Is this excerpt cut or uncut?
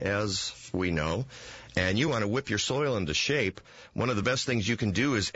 uncut